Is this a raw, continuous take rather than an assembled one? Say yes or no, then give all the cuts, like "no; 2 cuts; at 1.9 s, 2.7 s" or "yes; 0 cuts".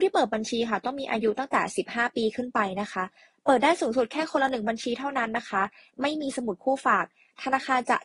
yes; 0 cuts